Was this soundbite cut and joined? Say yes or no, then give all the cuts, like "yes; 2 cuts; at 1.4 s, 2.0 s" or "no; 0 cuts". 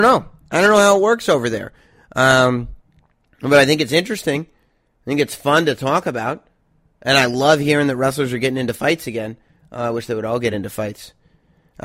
no; 0 cuts